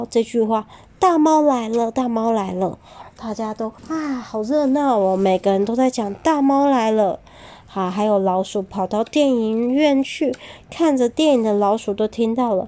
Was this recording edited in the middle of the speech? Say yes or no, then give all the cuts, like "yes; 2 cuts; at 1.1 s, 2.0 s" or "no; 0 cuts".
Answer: yes; 1 cut; at 3.8 s